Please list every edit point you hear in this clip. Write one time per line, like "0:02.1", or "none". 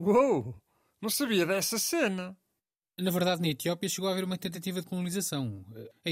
none